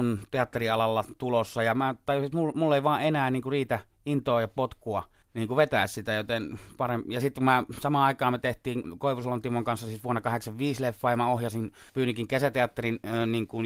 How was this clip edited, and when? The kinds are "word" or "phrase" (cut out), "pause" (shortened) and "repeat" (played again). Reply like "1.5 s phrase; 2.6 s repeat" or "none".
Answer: 5.2 s pause; 11.9 s pause